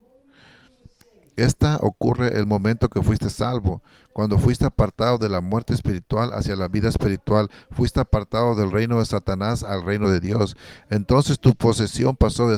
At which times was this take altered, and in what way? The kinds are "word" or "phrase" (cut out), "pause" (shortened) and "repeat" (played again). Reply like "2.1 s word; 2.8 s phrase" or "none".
none